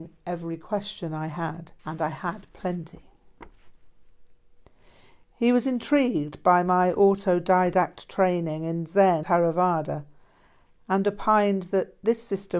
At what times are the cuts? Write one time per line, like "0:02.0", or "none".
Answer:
0:01.8
0:09.2